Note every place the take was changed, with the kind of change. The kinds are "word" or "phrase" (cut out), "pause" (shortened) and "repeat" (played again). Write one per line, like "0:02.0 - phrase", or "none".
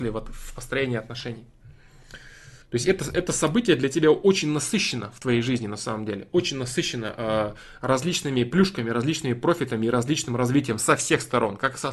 0:02.6 - pause